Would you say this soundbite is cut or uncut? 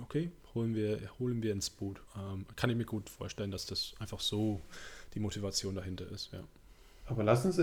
cut